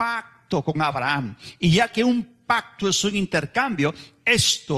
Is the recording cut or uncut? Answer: uncut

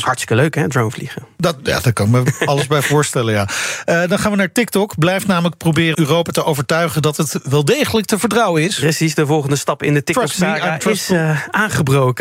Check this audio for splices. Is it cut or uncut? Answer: cut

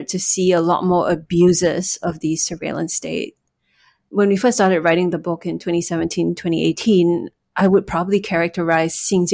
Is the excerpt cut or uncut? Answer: uncut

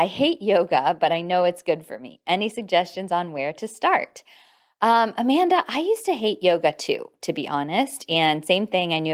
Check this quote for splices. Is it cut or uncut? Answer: uncut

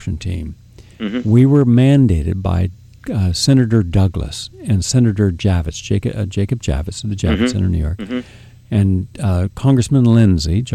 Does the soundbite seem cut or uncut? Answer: uncut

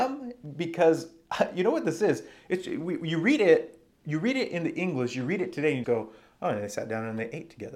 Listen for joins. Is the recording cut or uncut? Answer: cut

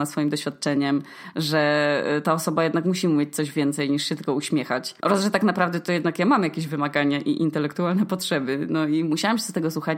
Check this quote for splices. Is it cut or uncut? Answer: cut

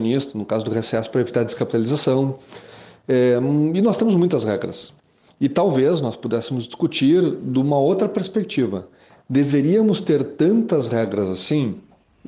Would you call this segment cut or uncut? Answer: uncut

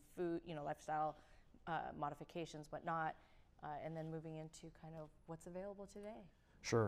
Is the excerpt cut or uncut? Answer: uncut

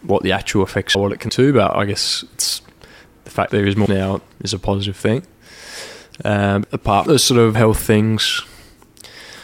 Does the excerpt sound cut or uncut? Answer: cut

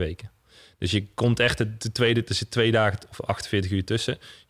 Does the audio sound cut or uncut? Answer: uncut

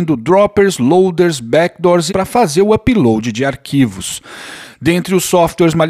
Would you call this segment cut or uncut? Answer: cut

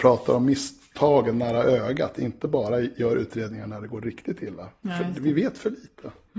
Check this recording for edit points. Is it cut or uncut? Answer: uncut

